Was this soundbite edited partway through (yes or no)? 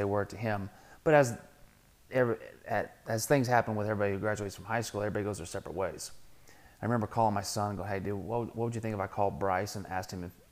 no